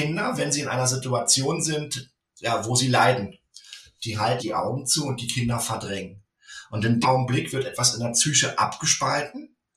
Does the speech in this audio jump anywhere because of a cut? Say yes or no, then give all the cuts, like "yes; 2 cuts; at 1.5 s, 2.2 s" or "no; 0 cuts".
yes; 2 cuts; at 4.4 s, 7.0 s